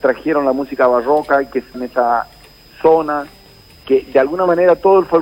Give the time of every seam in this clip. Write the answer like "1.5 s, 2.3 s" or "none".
1.7 s